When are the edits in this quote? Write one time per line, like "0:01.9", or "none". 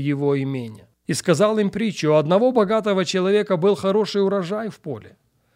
0:01.0